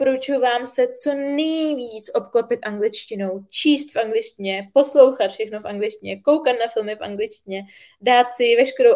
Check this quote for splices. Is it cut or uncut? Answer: uncut